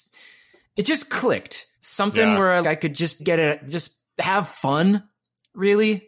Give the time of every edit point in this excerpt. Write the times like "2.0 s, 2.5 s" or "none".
1.7 s, 2.6 s, 3.2 s, 4.1 s